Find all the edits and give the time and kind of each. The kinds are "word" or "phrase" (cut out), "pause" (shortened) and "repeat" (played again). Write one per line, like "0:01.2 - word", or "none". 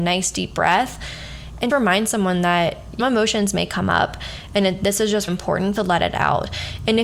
0:01.7 - word
0:03.0 - phrase
0:05.3 - word
0:05.8 - phrase